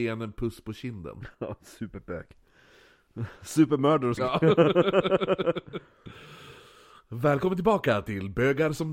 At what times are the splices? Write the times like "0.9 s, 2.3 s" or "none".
1.3 s, 4.2 s, 6.6 s